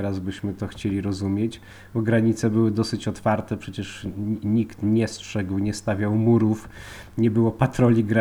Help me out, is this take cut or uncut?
uncut